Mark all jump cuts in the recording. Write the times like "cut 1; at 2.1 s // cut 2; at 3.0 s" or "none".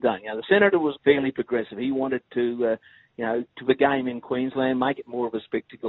cut 1; at 0.9 s // cut 2; at 3.6 s